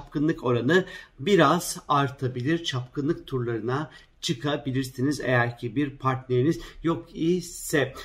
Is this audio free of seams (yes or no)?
yes